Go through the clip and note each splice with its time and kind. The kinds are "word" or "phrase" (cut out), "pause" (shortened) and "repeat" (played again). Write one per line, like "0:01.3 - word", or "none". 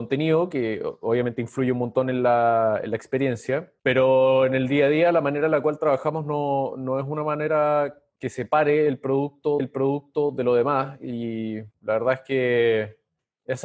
0:03.8 - pause
0:09.6 - repeat
0:11.7 - pause